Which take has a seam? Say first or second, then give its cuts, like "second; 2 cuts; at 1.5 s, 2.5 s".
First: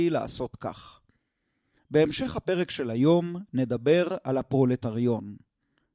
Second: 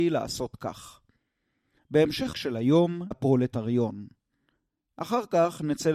second; 2 cuts; at 2.3 s, 3.1 s